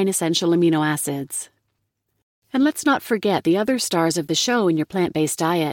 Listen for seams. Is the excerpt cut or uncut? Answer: uncut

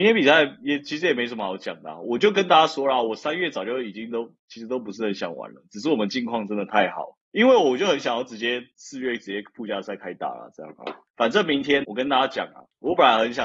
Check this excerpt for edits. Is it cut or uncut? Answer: cut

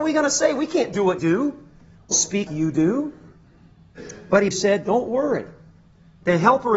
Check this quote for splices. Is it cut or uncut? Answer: cut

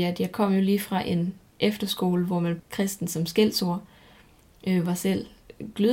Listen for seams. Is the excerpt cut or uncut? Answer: cut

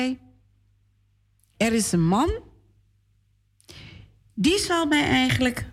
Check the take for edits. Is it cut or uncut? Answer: uncut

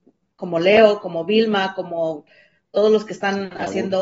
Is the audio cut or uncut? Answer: uncut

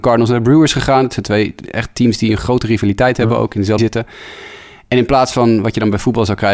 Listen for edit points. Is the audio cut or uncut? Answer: cut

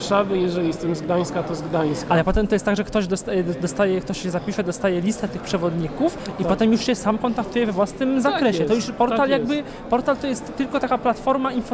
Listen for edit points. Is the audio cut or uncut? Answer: uncut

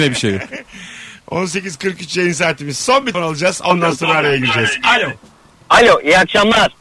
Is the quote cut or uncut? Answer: cut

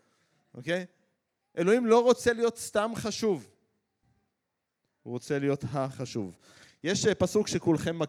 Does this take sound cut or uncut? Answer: uncut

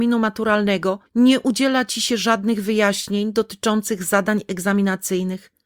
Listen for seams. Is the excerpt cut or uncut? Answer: cut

